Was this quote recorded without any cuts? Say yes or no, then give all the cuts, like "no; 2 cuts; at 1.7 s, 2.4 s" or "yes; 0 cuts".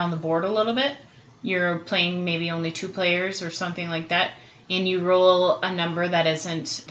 yes; 0 cuts